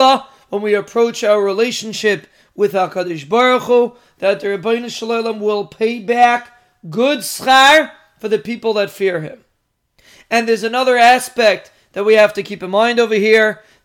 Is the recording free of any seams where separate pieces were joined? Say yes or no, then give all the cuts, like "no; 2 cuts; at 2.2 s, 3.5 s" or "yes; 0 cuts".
yes; 0 cuts